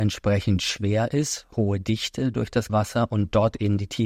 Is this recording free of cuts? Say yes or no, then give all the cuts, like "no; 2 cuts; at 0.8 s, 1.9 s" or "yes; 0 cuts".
no; 1 cut; at 2.7 s